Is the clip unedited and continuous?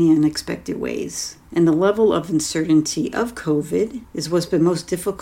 no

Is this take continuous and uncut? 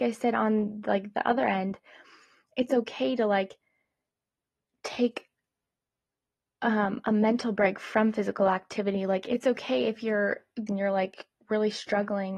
no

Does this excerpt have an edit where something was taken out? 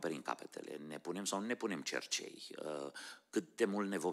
no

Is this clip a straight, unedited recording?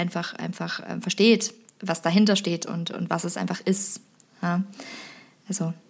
yes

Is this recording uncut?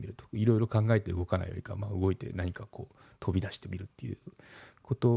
yes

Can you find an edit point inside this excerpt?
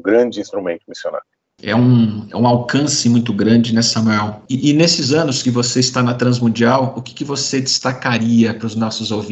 no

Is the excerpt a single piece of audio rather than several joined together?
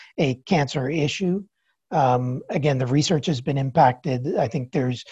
yes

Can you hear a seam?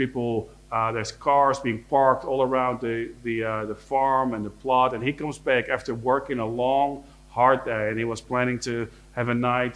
no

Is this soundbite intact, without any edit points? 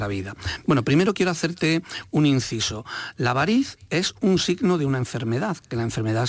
yes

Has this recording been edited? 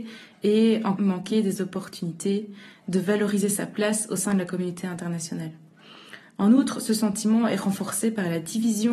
yes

